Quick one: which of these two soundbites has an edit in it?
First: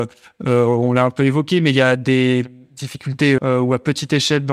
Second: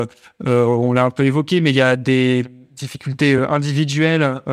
first; 1 cut; at 3.4 s

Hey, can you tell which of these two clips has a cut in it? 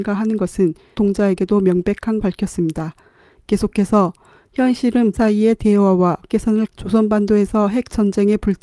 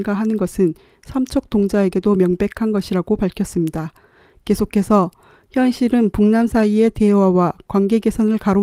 first; 5 cuts; at 0.9 s, 2.2 s, 5.1 s, 6.3 s, 6.7 s

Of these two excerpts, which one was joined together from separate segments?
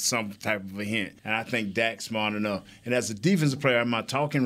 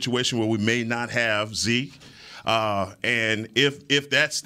first; 1 cut; at 1.2 s

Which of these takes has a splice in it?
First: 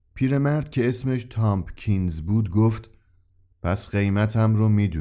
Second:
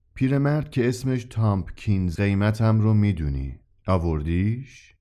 second; 1 cut; at 2.2 s

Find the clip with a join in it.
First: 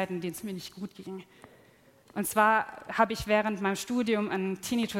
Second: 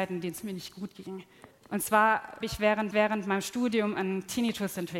second; 3 cuts; at 1.5 s, 2.4 s, 2.9 s

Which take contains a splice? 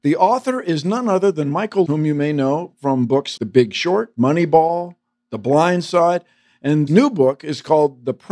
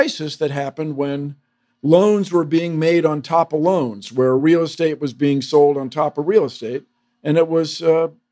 first; 3 cuts; at 1.9 s, 3.4 s, 6.9 s

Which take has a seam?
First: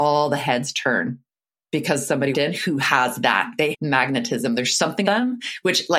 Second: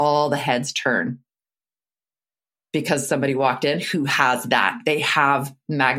first; 4 cuts; at 1.3 s, 2.3 s, 3.7 s, 5.0 s

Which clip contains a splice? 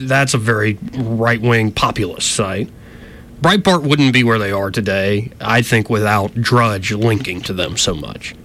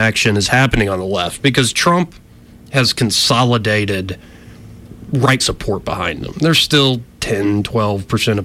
second; 1 cut; at 5.4 s

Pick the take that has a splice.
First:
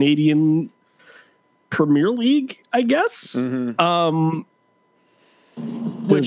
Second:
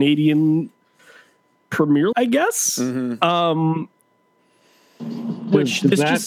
second; 1 cut; at 2.1 s

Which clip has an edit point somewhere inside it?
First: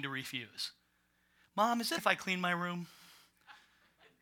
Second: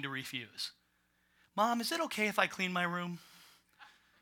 first; 1 cut; at 2.0 s

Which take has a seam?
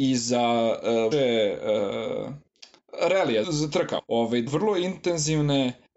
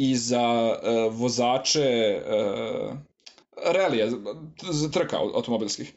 first; 4 cuts; at 1.1 s, 3.4 s, 4.0 s, 4.5 s

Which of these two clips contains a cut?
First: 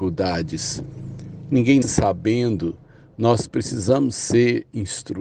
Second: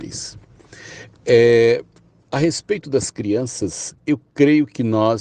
first; 1 cut; at 1.8 s

